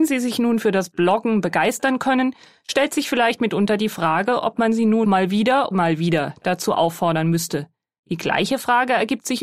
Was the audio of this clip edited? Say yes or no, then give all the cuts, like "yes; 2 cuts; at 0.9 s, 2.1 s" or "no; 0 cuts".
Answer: yes; 2 cuts; at 5.0 s, 5.7 s